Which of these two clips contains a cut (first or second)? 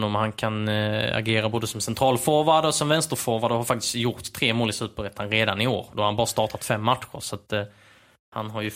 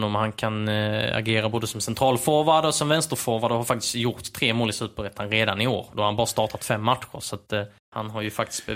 second